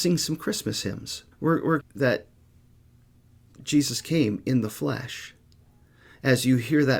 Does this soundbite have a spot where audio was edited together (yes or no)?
yes